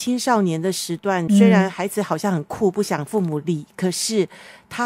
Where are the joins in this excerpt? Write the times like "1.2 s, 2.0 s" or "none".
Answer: 1.3 s